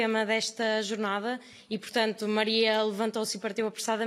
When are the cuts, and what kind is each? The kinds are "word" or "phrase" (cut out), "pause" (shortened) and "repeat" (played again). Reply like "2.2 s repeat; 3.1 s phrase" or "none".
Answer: none

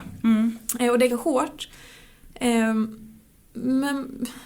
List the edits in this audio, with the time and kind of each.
1.1 s phrase

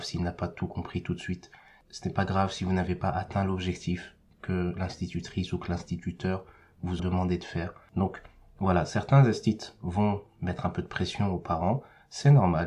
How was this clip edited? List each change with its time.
7.0 s word

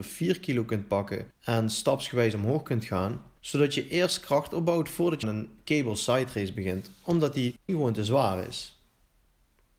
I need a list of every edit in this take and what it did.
5.2 s word; 7.7 s phrase

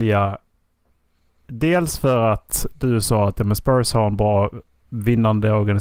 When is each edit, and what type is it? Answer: none

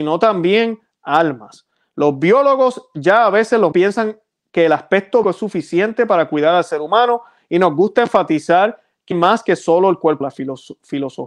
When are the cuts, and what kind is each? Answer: 3.7 s word; 5.2 s word; 9.1 s word; 10.2 s word

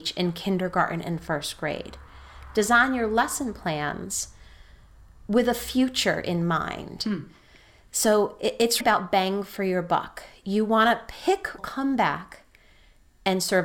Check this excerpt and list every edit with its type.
8.8 s word; 11.6 s phrase

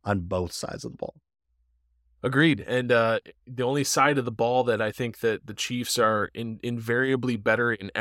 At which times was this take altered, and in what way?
none

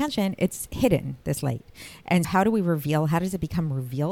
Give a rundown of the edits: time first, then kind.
2.2 s word

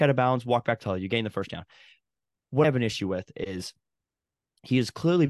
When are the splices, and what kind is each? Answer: 2.6 s word

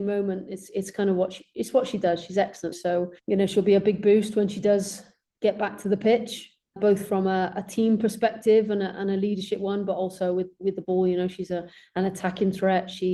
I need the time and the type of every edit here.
2.7 s phrase; 3.2 s pause; 6.8 s word

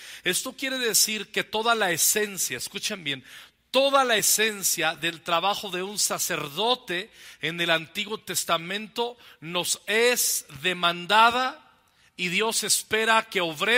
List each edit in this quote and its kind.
none

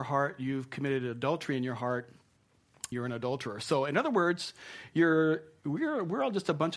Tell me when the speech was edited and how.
2.9 s word

